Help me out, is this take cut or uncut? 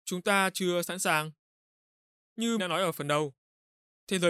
cut